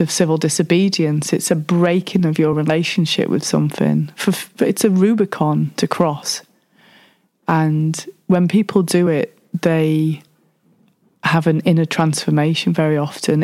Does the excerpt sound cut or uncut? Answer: uncut